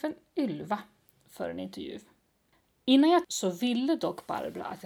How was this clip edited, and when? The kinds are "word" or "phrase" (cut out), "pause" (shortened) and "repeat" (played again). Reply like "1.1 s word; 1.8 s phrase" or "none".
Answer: 3.2 s phrase